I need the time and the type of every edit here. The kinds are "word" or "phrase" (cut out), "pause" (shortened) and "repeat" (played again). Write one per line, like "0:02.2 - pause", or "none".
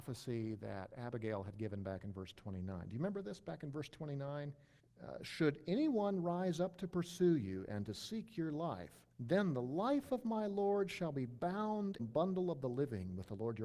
0:04.8 - pause
0:09.1 - pause
0:12.0 - phrase